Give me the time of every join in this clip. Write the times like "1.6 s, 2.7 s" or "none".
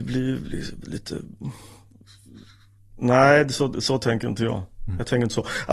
none

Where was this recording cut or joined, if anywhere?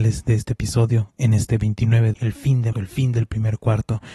2.1 s, 2.7 s

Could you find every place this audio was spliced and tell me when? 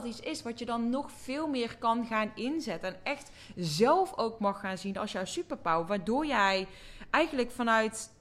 none

